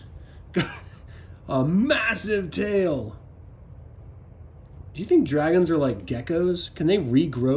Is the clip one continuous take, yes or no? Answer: yes